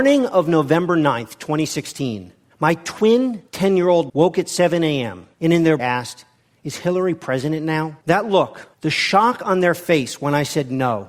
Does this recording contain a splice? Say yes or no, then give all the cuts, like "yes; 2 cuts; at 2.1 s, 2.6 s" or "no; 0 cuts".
yes; 5 cuts; at 4.1 s, 5.3 s, 5.8 s, 8.0 s, 8.7 s